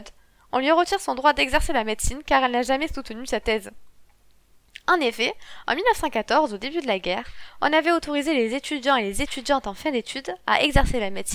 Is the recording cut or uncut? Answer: uncut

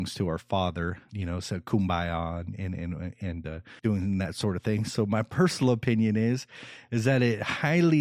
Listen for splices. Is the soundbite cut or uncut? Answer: cut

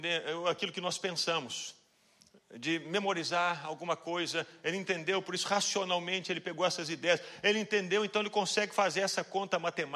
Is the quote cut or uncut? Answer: uncut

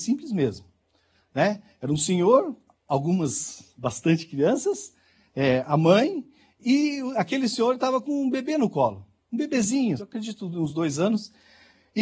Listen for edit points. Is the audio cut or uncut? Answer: cut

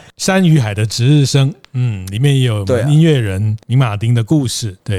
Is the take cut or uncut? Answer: uncut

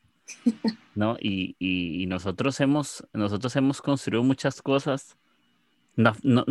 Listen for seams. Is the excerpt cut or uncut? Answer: uncut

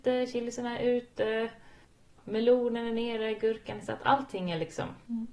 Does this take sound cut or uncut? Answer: uncut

